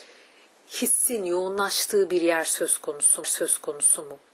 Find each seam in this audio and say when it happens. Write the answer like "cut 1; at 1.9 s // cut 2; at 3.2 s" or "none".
cut 1; at 3.2 s